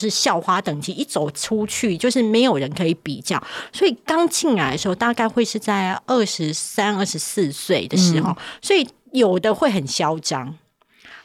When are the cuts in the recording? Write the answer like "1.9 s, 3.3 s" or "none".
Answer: none